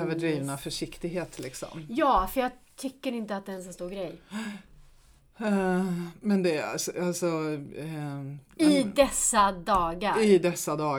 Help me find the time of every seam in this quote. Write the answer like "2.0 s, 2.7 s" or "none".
none